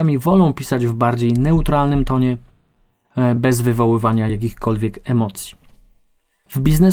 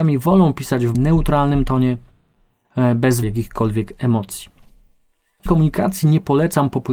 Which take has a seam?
second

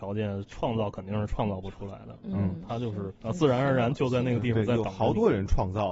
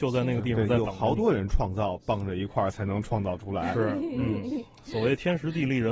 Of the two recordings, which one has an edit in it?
first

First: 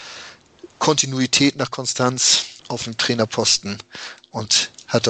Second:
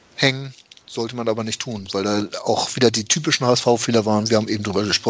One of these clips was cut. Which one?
first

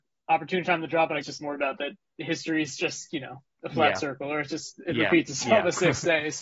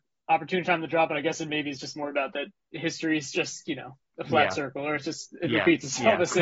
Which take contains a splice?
first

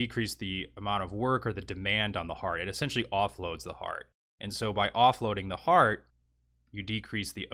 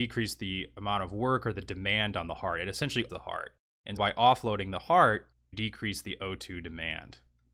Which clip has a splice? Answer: second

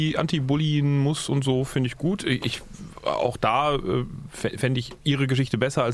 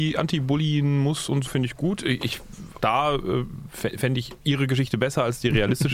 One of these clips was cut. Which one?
second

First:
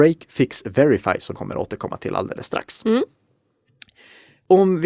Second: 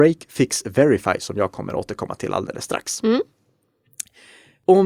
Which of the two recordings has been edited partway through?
first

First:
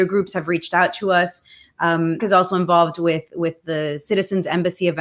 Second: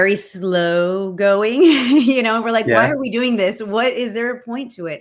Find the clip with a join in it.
first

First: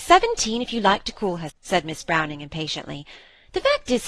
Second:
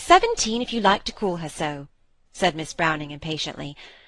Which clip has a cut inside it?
first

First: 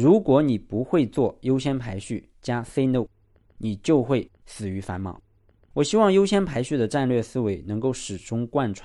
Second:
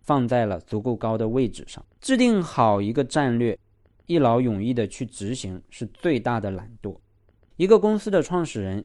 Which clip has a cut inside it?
second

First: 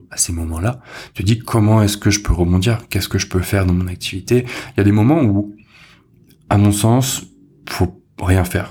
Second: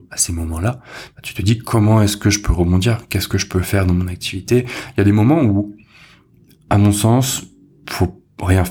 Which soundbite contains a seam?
first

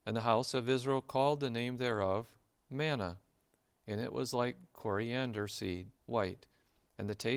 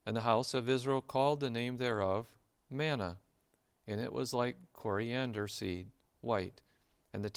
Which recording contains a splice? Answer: first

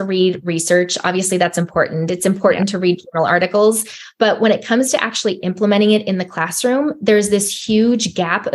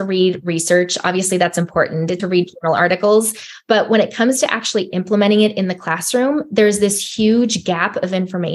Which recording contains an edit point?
second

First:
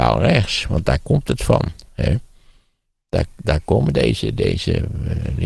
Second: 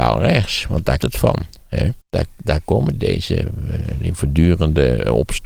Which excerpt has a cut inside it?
second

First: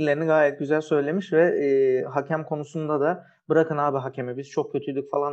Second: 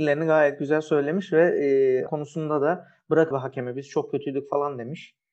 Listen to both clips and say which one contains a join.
second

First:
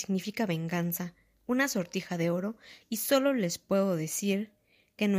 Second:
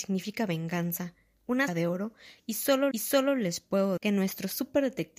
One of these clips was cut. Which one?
second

